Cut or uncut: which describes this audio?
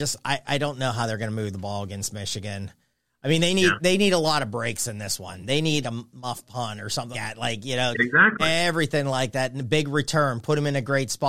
cut